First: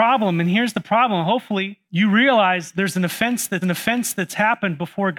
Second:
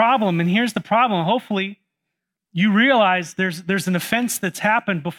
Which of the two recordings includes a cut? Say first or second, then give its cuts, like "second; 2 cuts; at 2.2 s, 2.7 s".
first; 3 cuts; at 1.9 s, 2.7 s, 3.6 s